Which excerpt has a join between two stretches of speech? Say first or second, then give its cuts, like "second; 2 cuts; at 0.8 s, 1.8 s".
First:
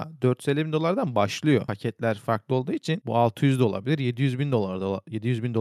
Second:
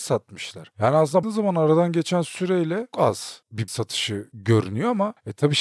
second; 3 cuts; at 1.2 s, 2.9 s, 3.7 s